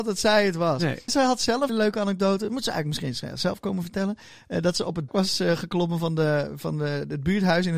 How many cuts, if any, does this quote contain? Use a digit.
3